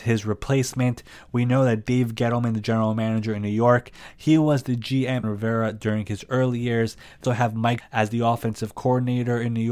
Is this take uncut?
no; 3 cuts; at 5.2 s, 7.2 s, 7.8 s

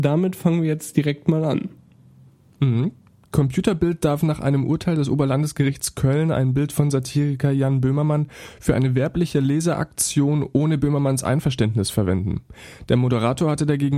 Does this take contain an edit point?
no; 0 cuts

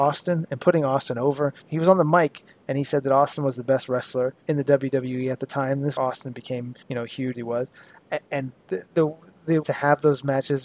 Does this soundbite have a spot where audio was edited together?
yes; 7 cuts; at 1.6 s, 4.4 s, 6.0 s, 6.8 s, 7.3 s, 8.6 s, 9.6 s

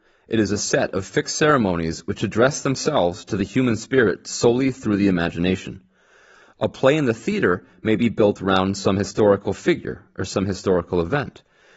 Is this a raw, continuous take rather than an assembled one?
yes; 0 cuts

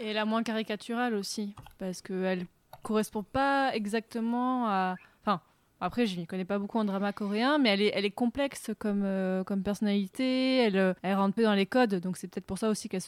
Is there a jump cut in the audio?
yes; 2 cuts; at 11.0 s, 11.4 s

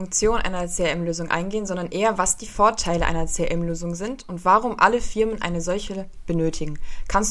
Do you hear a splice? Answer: no; 0 cuts

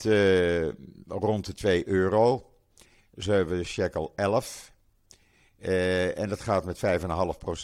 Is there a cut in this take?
no; 0 cuts

